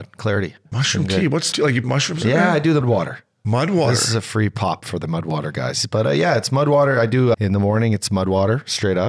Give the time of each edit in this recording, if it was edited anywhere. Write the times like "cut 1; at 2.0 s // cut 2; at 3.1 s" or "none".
cut 1; at 1.5 s // cut 2; at 1.8 s // cut 3; at 2.8 s // cut 4; at 4.8 s // cut 5; at 7.3 s